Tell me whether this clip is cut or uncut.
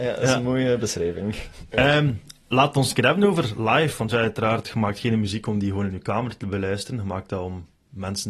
uncut